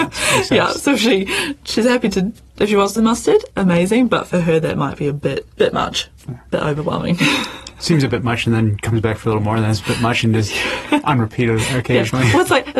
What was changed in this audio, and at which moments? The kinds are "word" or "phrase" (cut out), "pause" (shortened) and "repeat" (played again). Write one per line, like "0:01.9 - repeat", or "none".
0:03.0 - phrase
0:05.5 - pause